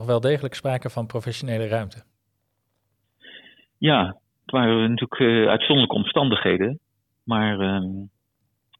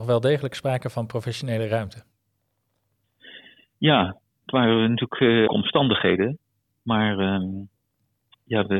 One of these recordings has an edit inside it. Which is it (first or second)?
second